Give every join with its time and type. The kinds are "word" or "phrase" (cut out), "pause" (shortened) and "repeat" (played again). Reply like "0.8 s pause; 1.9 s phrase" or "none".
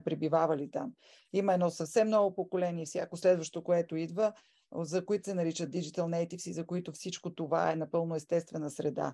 5.0 s word

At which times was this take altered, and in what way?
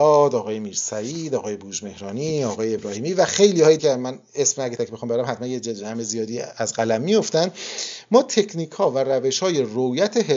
3.8 s word; 4.8 s word

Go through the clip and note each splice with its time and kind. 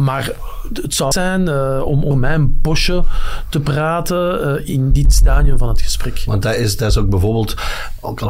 1.1 s word; 2.1 s phrase; 4.7 s word

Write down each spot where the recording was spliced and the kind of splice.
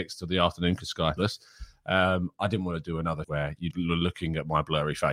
1.2 s word; 3.2 s word; 3.7 s word

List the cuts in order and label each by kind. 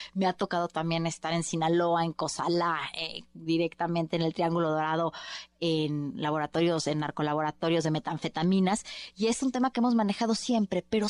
none

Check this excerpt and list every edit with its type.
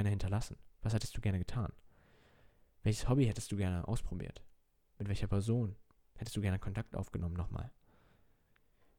none

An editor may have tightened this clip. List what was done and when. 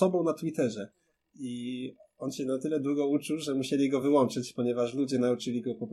none

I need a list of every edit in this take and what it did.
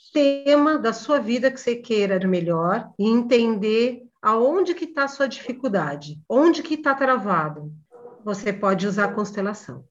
2.2 s word

